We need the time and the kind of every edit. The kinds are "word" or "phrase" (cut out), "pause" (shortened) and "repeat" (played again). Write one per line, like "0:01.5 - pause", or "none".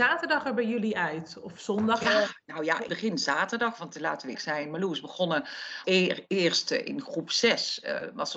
0:02.9 - word
0:04.3 - word
0:05.8 - word